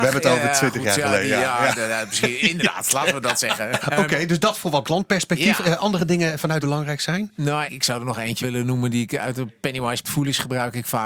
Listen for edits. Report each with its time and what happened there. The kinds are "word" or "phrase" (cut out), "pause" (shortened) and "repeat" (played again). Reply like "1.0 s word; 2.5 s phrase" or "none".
3.8 s word; 4.8 s word; 6.6 s phrase; 7.7 s word; 8.4 s word; 10.0 s word